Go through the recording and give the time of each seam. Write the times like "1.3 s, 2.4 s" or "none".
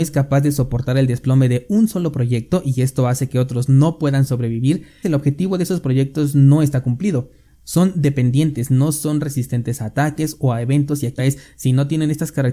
5.0 s, 11.2 s